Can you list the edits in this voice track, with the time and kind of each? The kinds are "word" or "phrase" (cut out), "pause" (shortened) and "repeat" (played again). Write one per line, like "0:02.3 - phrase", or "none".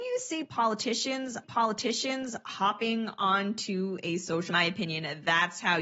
0:01.4 - repeat
0:04.5 - phrase